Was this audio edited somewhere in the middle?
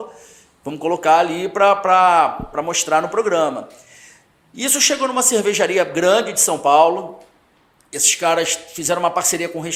no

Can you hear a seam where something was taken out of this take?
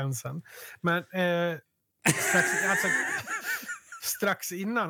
no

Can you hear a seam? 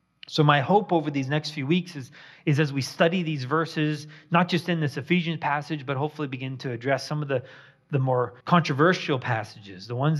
yes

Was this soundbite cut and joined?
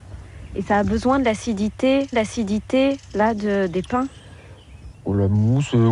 yes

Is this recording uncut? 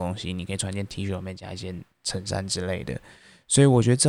yes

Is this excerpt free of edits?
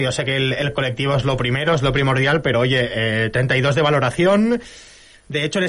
yes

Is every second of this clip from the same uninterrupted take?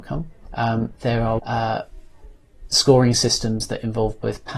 no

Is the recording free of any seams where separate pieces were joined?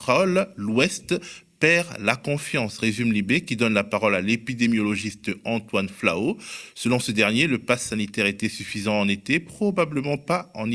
yes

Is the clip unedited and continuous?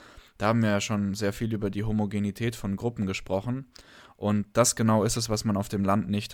yes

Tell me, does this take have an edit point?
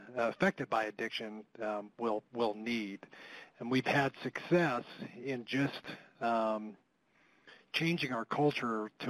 no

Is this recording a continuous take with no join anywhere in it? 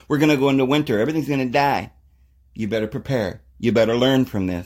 yes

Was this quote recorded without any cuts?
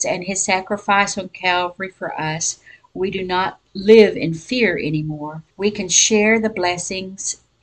no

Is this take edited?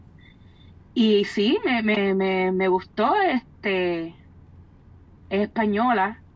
no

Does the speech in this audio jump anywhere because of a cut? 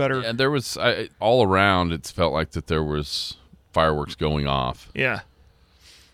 yes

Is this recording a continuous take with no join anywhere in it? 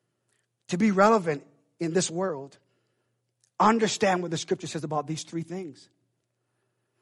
yes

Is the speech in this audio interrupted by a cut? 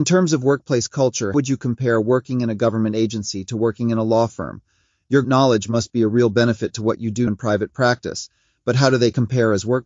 yes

